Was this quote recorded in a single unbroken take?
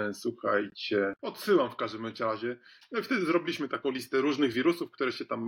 yes; 0 cuts

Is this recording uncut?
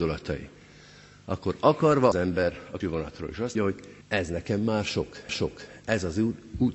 no; 5 cuts; at 2.1 s, 2.8 s, 3.6 s, 4.0 s, 5.3 s

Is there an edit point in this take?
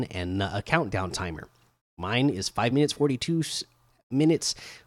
no; 0 cuts

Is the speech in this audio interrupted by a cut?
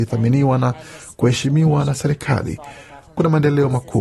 no; 0 cuts

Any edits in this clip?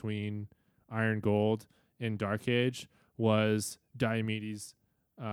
no; 0 cuts

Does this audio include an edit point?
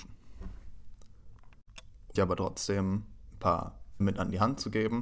yes; 2 cuts; at 2.2 s, 4.0 s

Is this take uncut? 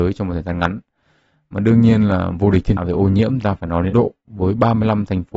no; 3 cuts; at 2.8 s, 3.4 s, 3.9 s

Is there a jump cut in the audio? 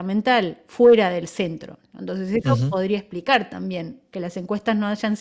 no; 0 cuts

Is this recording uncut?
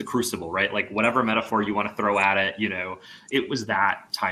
no; 1 cut; at 3.3 s

